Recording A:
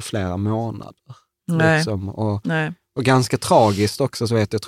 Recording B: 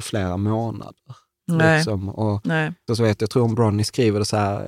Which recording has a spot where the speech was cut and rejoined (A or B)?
B